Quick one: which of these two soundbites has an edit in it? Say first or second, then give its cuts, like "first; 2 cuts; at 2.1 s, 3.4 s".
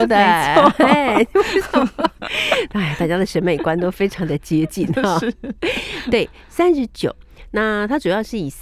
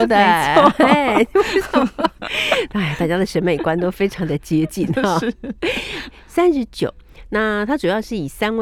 second; 1 cut; at 6.1 s